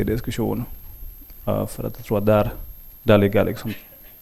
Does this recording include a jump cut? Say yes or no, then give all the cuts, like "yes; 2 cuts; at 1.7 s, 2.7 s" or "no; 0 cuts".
no; 0 cuts